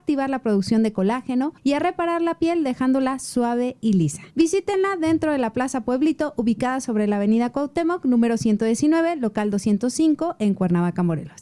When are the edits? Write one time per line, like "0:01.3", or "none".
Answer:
0:01.6
0:04.3